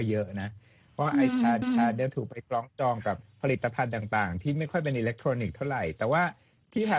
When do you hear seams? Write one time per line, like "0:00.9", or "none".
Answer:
0:01.6